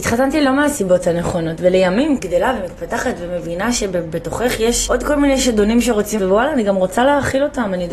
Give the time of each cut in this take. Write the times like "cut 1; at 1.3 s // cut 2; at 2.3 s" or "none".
cut 1; at 2.2 s // cut 2; at 4.9 s // cut 3; at 6.2 s